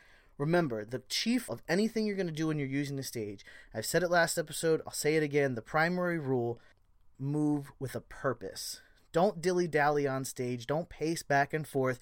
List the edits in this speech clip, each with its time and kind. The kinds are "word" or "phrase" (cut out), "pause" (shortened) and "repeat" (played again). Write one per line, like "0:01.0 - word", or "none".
0:01.5 - word
0:07.1 - word